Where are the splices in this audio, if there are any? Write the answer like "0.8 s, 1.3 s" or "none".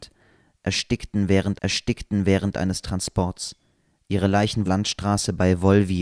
1.5 s, 4.7 s